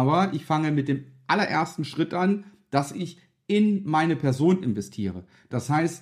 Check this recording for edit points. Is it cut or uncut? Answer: uncut